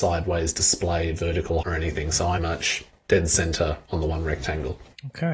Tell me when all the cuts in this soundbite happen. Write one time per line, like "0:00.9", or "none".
0:01.6
0:02.4